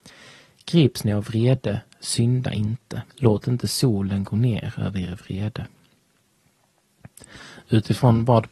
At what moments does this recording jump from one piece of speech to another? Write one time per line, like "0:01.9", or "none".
0:03.1